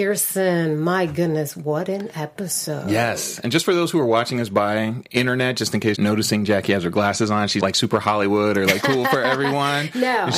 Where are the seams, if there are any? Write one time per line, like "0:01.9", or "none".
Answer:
0:05.9
0:07.6
0:08.8

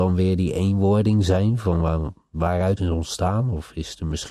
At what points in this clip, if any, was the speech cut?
0:02.8

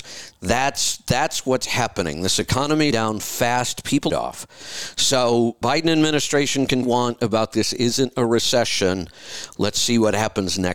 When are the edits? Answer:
0:02.9
0:04.1
0:05.6
0:06.8

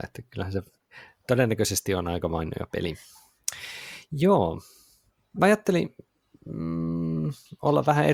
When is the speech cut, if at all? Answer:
none

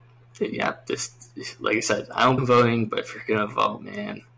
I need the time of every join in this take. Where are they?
0:02.4

